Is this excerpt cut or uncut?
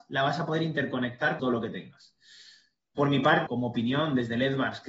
cut